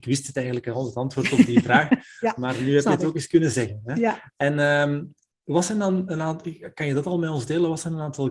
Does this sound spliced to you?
no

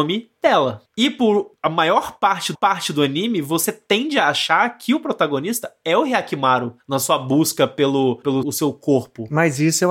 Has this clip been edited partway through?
yes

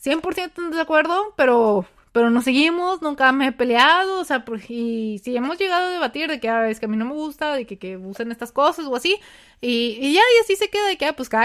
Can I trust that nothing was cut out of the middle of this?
yes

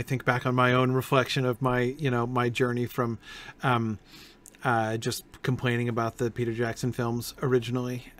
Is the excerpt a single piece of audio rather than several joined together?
yes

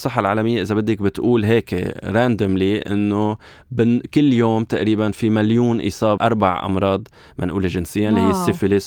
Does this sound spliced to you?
yes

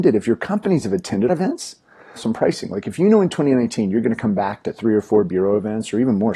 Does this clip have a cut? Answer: yes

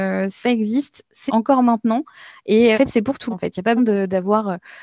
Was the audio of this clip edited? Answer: yes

